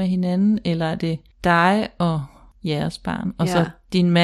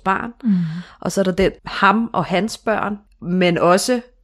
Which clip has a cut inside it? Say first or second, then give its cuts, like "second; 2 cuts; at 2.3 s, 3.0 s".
second; 1 cut; at 1.6 s